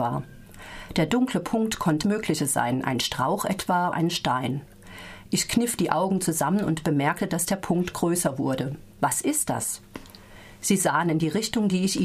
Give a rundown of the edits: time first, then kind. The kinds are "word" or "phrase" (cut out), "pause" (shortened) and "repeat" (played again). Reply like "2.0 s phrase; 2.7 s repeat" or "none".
2.0 s word; 3.9 s word; 8.9 s pause